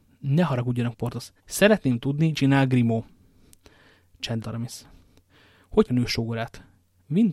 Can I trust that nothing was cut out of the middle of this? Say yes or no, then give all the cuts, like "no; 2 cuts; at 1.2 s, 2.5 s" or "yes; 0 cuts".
no; 5 cuts; at 0.9 s, 1.4 s, 2.3 s, 4.4 s, 5.9 s